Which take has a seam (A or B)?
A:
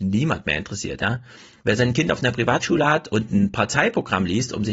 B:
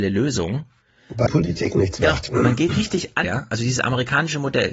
B